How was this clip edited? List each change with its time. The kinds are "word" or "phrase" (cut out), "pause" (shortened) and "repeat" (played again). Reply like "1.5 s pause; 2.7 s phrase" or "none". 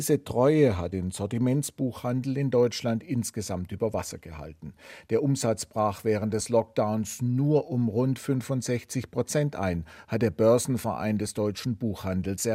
none